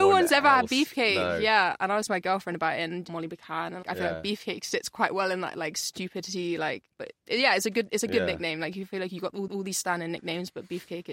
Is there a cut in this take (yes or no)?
yes